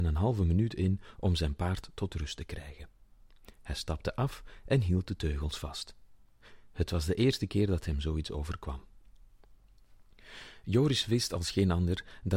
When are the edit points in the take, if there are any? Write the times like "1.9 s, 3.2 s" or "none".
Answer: none